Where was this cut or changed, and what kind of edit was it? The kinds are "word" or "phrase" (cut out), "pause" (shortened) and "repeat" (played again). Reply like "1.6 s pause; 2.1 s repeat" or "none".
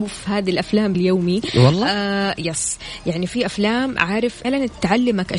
0.9 s word; 4.4 s phrase